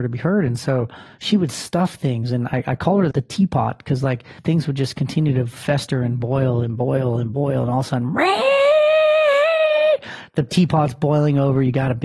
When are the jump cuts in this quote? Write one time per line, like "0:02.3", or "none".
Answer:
0:03.1
0:04.4